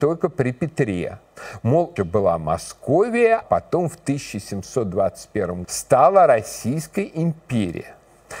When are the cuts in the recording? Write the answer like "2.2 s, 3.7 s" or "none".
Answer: 2.0 s, 3.4 s, 5.6 s